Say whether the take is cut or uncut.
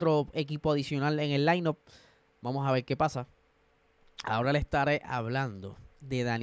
uncut